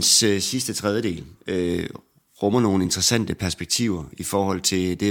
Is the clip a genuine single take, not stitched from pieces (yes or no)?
yes